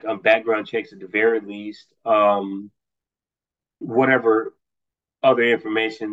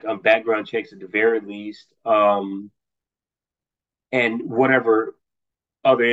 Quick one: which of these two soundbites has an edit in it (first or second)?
first